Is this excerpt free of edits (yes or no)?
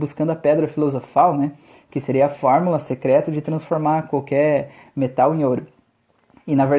yes